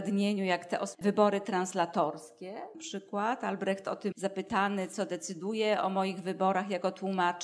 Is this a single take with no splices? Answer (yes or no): no